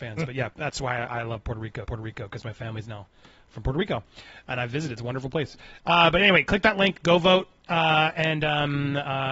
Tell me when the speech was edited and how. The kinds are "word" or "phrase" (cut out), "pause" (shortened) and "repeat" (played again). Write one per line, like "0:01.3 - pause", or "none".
0:01.8 - repeat